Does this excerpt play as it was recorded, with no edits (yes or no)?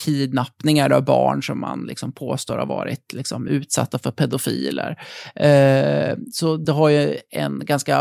yes